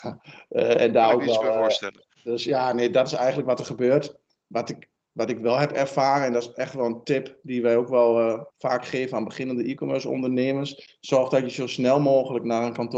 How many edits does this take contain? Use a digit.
2